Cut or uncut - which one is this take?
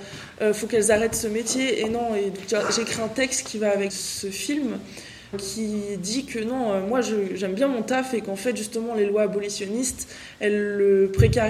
cut